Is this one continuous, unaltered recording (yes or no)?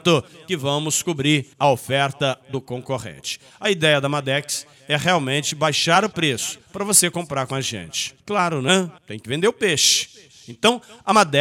no